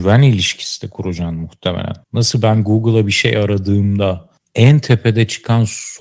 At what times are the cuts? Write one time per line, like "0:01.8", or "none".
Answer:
0:02.0
0:04.4